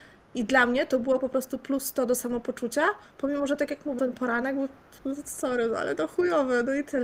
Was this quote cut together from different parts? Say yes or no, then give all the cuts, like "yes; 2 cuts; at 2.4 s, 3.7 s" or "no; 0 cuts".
yes; 1 cut; at 4.0 s